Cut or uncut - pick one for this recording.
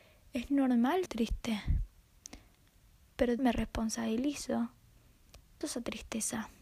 cut